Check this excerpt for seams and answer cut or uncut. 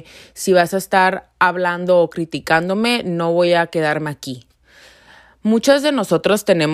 uncut